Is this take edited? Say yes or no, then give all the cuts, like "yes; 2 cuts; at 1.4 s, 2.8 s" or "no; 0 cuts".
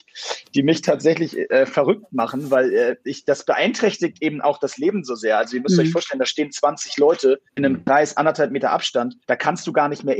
yes; 2 cuts; at 7.5 s, 9.2 s